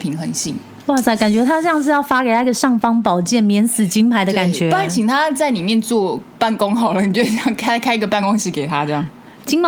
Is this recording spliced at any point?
no; 0 cuts

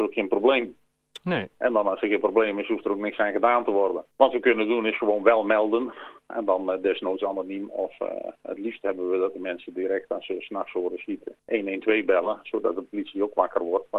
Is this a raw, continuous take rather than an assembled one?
no; 2 cuts; at 4.1 s, 11.4 s

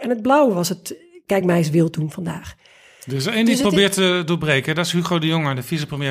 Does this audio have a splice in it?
no; 0 cuts

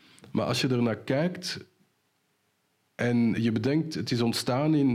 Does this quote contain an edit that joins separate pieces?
no; 0 cuts

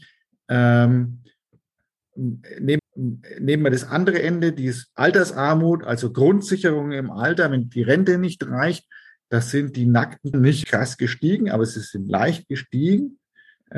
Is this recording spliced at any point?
yes; 3 cuts; at 2.8 s, 10.3 s, 10.6 s

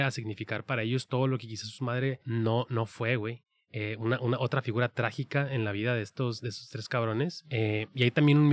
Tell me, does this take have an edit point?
no; 0 cuts

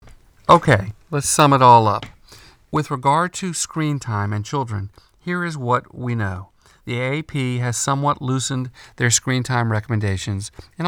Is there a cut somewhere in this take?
no; 0 cuts

